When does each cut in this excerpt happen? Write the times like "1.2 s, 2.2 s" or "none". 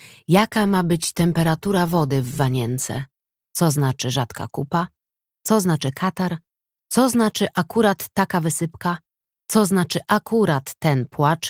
none